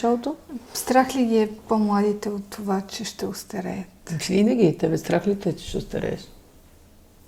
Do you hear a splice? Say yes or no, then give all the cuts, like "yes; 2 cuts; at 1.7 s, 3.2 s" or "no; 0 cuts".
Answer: no; 0 cuts